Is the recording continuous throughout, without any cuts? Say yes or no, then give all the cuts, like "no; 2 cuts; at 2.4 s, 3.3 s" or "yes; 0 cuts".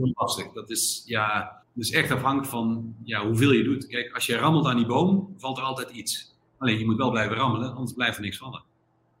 no; 1 cut; at 1.6 s